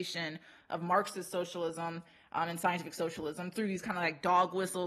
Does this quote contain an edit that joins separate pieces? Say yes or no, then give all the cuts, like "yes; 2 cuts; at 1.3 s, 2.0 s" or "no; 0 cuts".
no; 0 cuts